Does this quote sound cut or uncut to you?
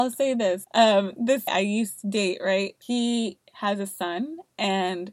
cut